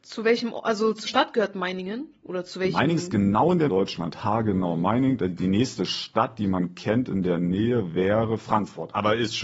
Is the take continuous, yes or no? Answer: no